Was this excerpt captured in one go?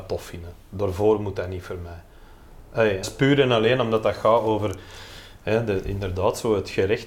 no; 1 cut; at 3.0 s

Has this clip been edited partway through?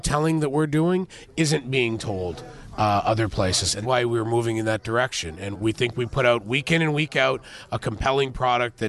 yes; 2 cuts; at 3.8 s, 5.5 s

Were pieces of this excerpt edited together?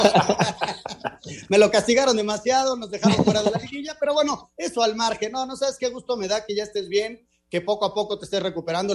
no; 0 cuts

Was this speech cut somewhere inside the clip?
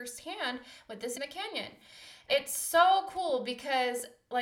yes; 2 cuts; at 1.1 s, 2.3 s

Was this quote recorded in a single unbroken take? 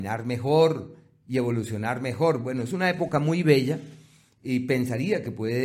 yes; 0 cuts

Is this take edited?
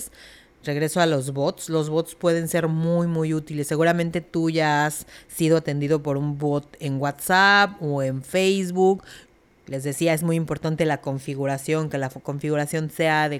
no; 0 cuts

